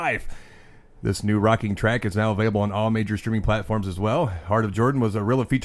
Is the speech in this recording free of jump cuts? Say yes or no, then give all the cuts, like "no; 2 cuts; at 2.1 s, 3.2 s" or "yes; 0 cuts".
yes; 0 cuts